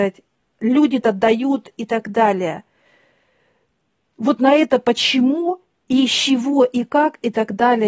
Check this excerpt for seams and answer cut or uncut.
cut